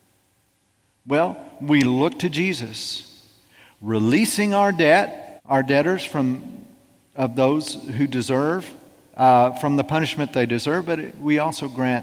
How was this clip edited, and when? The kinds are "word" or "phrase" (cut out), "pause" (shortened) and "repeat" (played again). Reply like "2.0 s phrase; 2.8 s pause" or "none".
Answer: 5.4 s pause